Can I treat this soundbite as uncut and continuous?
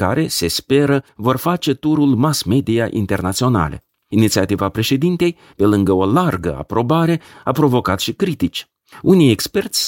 yes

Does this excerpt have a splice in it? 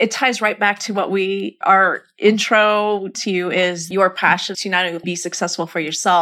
yes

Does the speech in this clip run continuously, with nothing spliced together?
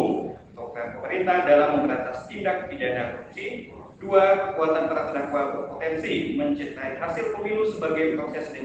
yes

